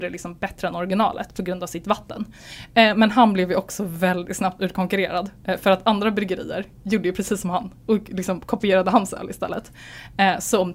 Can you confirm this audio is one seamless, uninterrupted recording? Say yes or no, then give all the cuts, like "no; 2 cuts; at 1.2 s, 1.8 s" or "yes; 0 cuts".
no; 1 cut; at 7.8 s